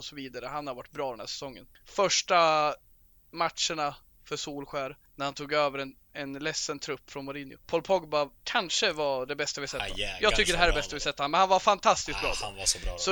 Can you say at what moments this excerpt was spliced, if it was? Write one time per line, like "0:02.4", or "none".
0:01.7
0:05.1
0:07.6
0:08.4